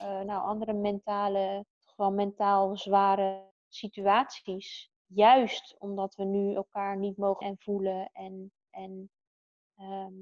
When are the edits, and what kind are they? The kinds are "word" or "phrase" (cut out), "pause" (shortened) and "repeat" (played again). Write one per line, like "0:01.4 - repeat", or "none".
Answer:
0:01.7 - pause
0:03.5 - word
0:05.0 - pause
0:07.4 - word
0:08.7 - repeat